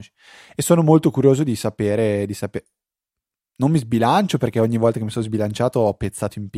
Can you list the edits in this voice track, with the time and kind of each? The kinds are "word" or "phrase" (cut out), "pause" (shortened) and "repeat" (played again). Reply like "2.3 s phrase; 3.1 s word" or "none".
none